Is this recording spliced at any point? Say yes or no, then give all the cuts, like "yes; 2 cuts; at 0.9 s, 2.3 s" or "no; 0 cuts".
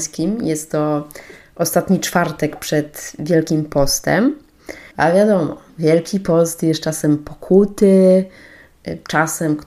yes; 1 cut; at 4.9 s